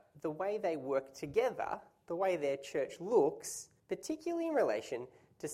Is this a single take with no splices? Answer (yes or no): no